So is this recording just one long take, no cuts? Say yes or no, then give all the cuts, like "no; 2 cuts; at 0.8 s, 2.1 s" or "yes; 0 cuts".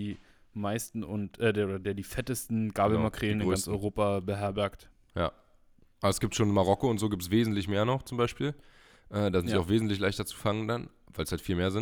yes; 0 cuts